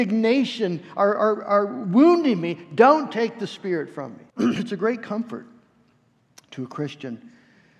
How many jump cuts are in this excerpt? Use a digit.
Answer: 1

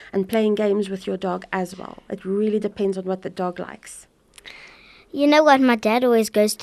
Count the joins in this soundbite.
0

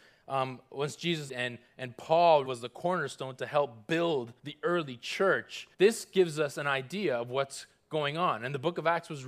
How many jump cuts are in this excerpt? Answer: 4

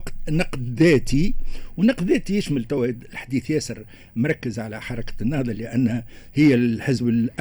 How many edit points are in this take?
0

